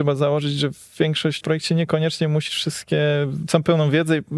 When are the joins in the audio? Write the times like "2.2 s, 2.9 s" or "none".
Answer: 1.4 s, 2.5 s